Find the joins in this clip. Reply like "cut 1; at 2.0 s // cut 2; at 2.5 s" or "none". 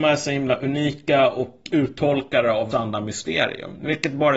cut 1; at 1.7 s // cut 2; at 2.7 s